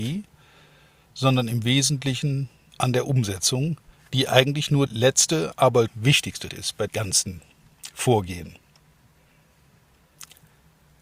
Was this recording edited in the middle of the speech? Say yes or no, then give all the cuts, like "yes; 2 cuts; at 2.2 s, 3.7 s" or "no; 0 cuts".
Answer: yes; 6 cuts; at 2.7 s, 3.9 s, 4.9 s, 5.9 s, 6.5 s, 6.9 s